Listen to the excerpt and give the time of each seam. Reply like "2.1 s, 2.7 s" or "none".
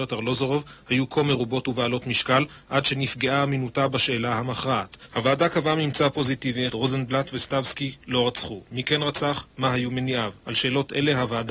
6.7 s, 10.4 s